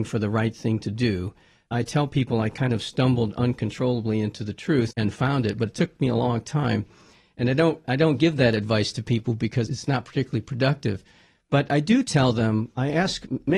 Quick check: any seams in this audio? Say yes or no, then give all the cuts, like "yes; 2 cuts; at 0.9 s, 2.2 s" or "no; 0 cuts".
yes; 3 cuts; at 4.9 s, 7.8 s, 9.7 s